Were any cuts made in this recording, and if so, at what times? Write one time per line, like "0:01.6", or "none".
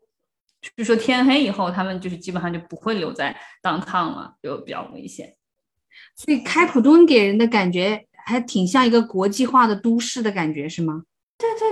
0:05.8